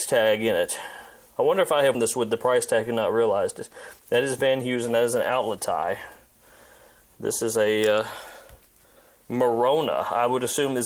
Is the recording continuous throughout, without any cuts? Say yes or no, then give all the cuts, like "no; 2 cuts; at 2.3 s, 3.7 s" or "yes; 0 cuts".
no; 1 cut; at 1.9 s